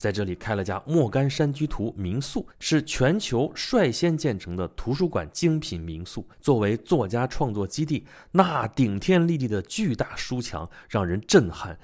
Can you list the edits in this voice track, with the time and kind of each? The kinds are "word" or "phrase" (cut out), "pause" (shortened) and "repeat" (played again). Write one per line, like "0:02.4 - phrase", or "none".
0:02.5 - pause
0:06.3 - pause